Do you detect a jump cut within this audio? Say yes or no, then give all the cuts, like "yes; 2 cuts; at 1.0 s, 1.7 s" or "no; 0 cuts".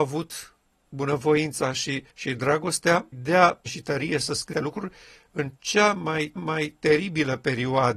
yes; 6 cuts; at 2.1 s, 3.1 s, 3.7 s, 4.5 s, 5.6 s, 6.4 s